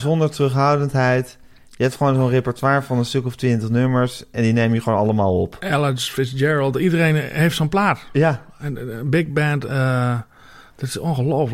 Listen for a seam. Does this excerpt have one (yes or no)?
no